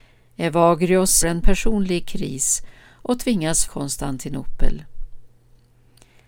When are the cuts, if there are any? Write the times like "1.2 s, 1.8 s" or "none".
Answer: 1.2 s, 3.6 s

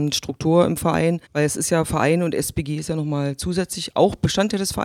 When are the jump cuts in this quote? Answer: 1.3 s

